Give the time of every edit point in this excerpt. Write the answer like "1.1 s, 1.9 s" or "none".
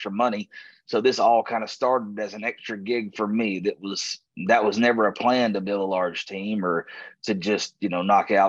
none